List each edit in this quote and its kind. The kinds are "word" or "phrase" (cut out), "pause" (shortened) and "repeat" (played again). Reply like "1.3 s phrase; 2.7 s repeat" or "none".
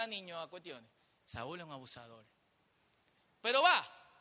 none